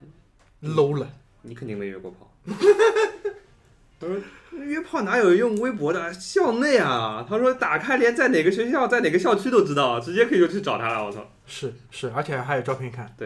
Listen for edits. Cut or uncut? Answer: uncut